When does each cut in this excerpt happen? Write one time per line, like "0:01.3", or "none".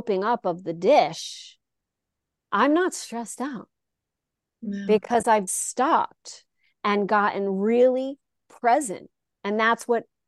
0:05.5